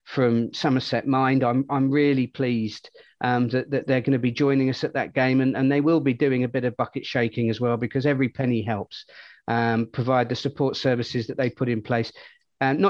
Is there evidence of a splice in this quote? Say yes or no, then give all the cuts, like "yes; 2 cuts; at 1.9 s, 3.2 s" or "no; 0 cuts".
no; 0 cuts